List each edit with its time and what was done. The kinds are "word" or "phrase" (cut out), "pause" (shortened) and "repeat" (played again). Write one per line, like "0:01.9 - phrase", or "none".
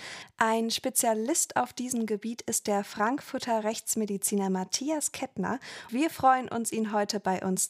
0:05.9 - word